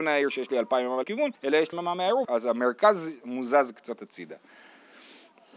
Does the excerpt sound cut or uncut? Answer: cut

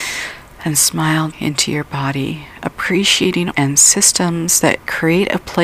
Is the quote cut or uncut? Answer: cut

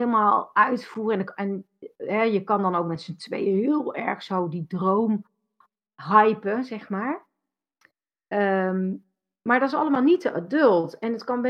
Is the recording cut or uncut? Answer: uncut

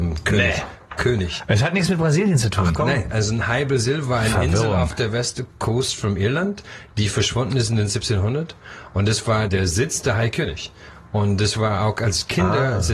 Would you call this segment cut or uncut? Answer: cut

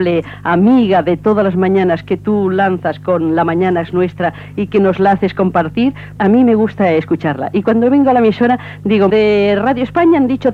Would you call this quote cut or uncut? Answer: cut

